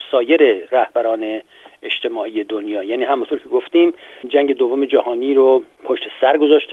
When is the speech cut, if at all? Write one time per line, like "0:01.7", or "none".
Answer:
none